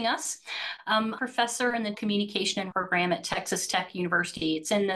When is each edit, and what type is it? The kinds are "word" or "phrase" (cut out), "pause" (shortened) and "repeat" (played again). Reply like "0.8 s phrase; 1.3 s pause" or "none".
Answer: 1.2 s phrase; 1.9 s word; 2.7 s word